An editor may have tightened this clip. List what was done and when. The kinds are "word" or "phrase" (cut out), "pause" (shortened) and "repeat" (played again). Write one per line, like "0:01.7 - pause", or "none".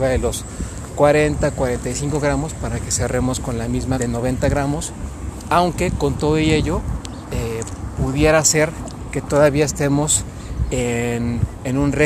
0:04.0 - word